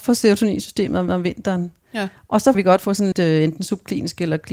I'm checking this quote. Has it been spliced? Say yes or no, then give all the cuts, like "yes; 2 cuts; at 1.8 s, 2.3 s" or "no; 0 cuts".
yes; 3 cuts; at 1.1 s, 2.5 s, 3.1 s